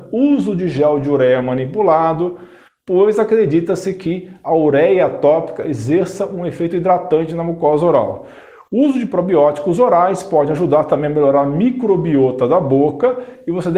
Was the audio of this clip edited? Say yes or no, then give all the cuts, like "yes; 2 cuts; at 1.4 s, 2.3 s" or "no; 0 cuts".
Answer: no; 0 cuts